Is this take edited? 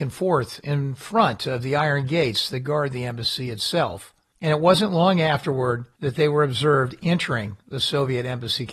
no; 0 cuts

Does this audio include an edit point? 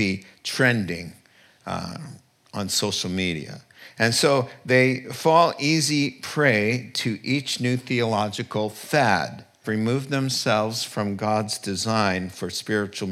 yes; 1 cut; at 9.6 s

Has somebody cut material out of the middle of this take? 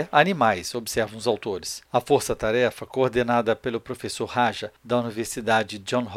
yes; 2 cuts; at 1.9 s, 4.8 s

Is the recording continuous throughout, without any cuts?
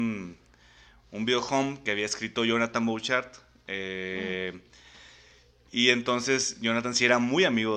yes; 0 cuts

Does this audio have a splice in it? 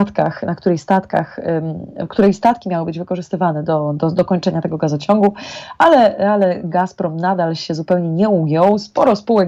no; 0 cuts

